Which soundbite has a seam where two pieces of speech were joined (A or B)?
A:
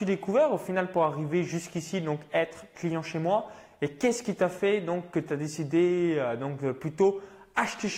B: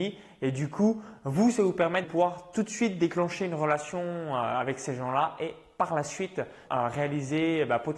B